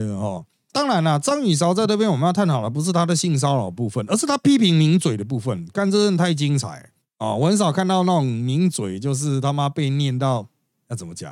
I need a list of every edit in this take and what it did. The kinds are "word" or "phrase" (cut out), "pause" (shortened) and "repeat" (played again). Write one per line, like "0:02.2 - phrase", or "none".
none